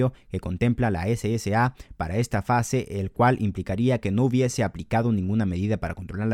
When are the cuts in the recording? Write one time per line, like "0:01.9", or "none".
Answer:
none